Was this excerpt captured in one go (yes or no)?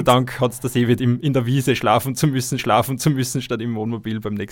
no